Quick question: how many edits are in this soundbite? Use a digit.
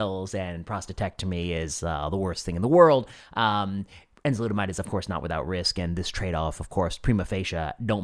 0